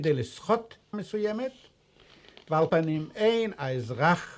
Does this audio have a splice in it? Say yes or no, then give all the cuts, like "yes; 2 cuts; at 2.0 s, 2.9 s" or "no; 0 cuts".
yes; 2 cuts; at 0.9 s, 2.7 s